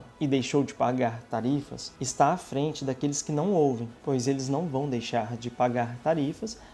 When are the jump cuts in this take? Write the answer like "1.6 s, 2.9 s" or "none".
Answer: none